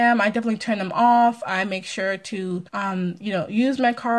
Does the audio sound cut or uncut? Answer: cut